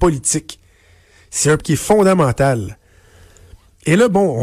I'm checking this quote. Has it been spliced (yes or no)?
yes